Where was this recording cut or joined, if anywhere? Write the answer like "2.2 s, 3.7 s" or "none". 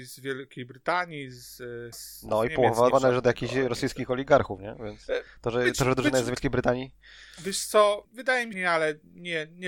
1.9 s, 2.9 s, 4.6 s, 8.0 s, 8.5 s